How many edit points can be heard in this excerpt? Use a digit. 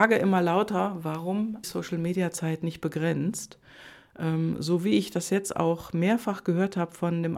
1